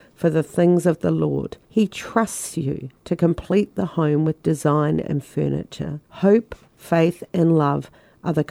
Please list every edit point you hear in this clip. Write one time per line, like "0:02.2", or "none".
0:01.6
0:03.0
0:06.0